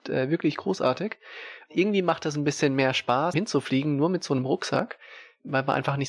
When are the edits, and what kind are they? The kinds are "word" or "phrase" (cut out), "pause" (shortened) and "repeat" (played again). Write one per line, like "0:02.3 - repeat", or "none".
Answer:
0:03.3 - word